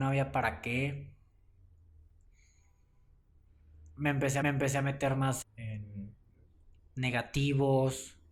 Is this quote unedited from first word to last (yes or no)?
no